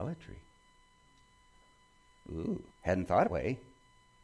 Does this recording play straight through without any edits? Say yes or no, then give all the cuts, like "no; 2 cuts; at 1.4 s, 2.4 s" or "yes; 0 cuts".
no; 2 cuts; at 2.7 s, 3.3 s